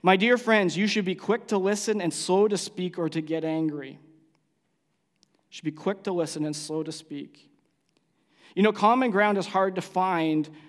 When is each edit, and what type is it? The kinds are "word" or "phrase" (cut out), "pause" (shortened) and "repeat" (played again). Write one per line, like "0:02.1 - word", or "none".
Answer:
none